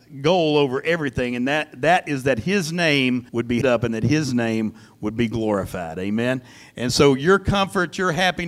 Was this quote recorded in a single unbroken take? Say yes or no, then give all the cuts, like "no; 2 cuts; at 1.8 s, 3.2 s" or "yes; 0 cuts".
no; 2 cuts; at 3.3 s, 3.6 s